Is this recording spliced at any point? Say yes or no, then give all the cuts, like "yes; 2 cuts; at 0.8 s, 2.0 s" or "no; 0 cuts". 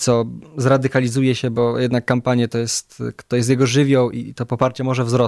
no; 0 cuts